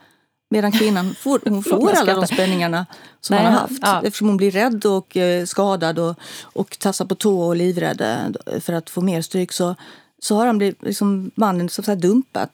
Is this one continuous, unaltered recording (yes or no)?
yes